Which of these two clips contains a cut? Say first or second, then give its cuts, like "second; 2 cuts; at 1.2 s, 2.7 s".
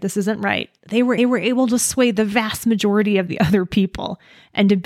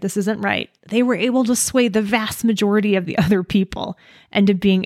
first; 1 cut; at 1.2 s